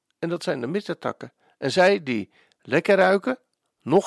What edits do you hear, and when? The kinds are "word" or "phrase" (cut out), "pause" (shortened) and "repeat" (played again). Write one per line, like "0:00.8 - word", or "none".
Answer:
none